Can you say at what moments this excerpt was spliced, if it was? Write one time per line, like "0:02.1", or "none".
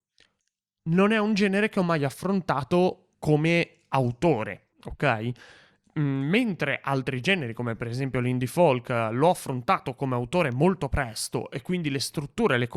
0:03.1
0:04.7